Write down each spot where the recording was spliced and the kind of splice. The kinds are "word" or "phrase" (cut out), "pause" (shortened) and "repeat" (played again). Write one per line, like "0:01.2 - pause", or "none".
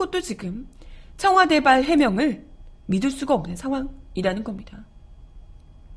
0:02.8 - pause